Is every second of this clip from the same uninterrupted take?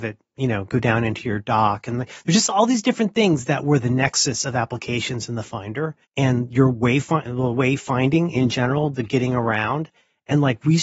no; 1 cut; at 6.0 s

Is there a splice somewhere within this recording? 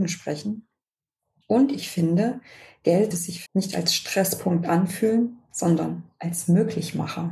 yes; 2 cuts; at 3.1 s, 3.5 s

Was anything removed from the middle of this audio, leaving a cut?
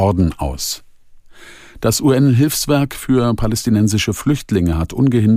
no; 0 cuts

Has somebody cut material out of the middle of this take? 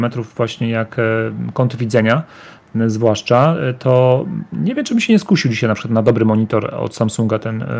no; 0 cuts

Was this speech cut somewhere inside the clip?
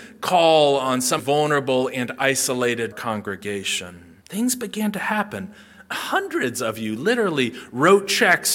yes; 3 cuts; at 1.2 s, 2.9 s, 4.2 s

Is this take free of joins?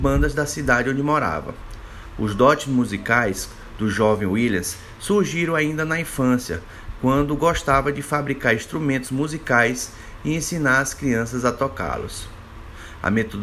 yes; 0 cuts

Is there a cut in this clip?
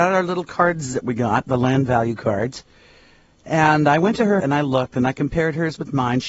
yes; 1 cut; at 4.4 s

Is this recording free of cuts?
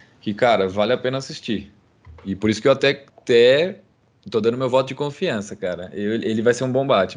no; 1 cut; at 3.1 s

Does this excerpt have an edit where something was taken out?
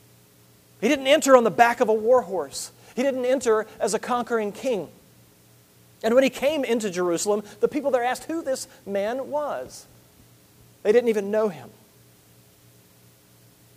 no; 0 cuts

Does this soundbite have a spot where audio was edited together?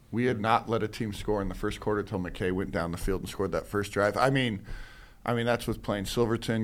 no; 0 cuts

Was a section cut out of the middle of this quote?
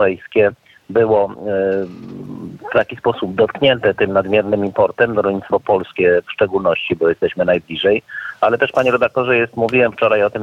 no; 0 cuts

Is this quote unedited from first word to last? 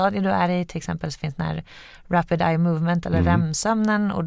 yes; 0 cuts

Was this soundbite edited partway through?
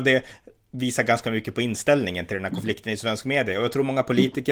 no; 0 cuts

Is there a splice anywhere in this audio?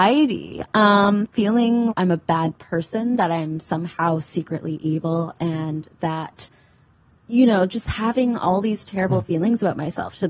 yes; 1 cut; at 1.9 s

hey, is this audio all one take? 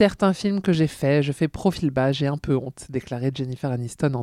yes; 0 cuts

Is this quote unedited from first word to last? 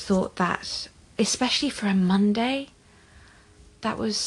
yes; 0 cuts

